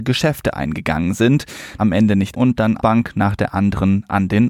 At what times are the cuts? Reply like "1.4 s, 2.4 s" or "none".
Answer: 1.8 s, 2.3 s, 2.8 s